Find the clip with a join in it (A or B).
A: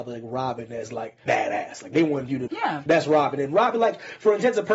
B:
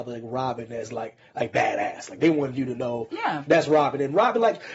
A